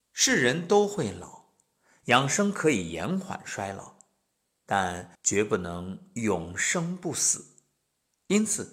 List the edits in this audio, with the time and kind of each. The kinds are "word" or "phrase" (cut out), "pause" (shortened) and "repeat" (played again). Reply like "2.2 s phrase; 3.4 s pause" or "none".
5.1 s pause